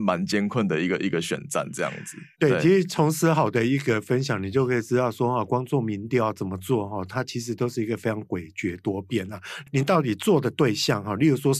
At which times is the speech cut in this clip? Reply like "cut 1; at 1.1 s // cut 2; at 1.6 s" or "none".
cut 1; at 2.3 s

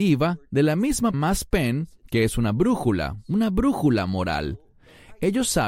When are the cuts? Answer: cut 1; at 1.1 s

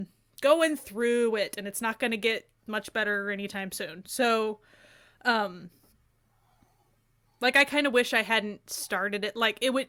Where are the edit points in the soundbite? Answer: none

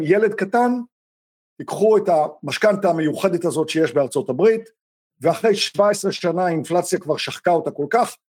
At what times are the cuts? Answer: cut 1; at 1.5 s

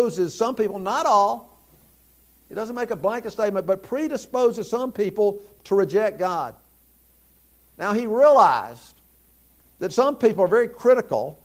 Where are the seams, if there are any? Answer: none

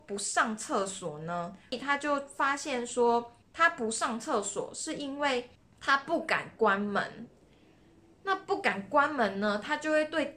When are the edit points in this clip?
cut 1; at 3.4 s // cut 2; at 5.5 s

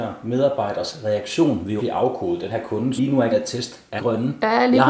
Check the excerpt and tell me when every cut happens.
cut 1; at 1.8 s // cut 2; at 2.5 s // cut 3; at 3.0 s // cut 4; at 3.3 s // cut 5; at 4.0 s

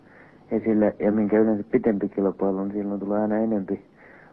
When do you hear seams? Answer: none

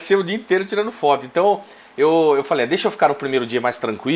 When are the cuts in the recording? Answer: none

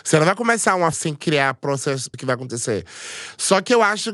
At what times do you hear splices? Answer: cut 1; at 0.9 s // cut 2; at 2.1 s

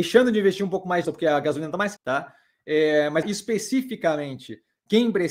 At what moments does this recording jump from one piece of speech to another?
cut 1; at 1.0 s // cut 2; at 2.0 s // cut 3; at 3.2 s

